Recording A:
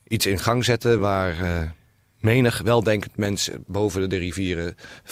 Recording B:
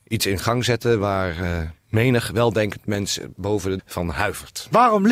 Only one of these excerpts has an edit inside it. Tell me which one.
B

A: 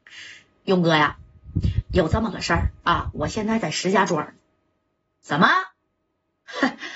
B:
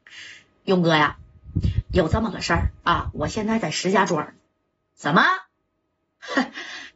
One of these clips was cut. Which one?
B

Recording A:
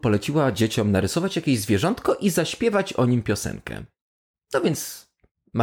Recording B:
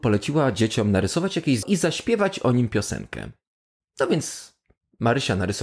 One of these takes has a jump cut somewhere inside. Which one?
B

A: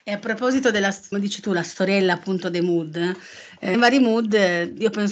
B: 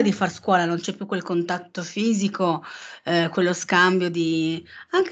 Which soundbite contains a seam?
A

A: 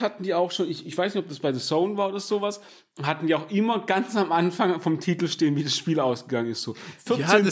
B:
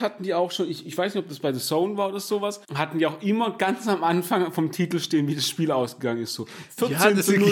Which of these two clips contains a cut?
B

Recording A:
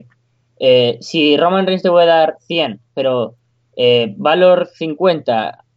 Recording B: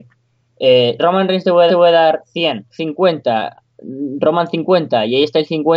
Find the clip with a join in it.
B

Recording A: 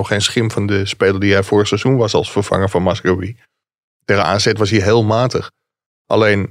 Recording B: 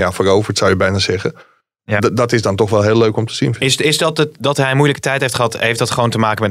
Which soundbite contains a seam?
B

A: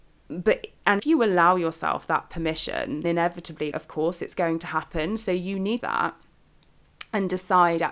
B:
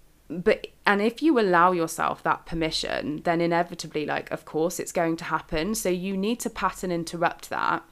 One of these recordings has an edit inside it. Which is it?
A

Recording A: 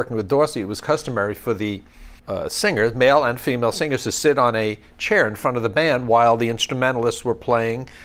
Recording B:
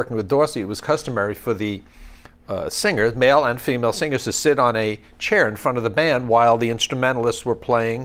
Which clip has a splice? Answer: A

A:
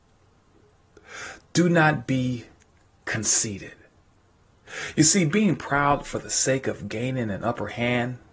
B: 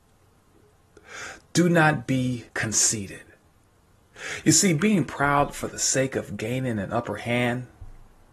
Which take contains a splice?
B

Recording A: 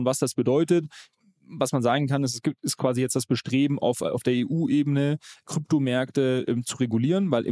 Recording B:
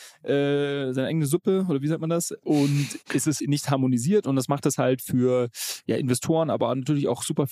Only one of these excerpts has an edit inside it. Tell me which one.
B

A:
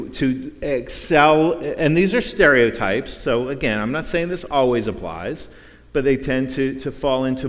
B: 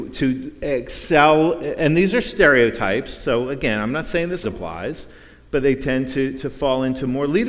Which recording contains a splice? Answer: B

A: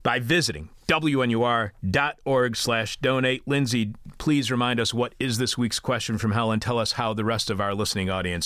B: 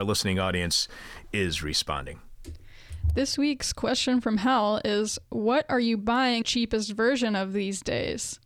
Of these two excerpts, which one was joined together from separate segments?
B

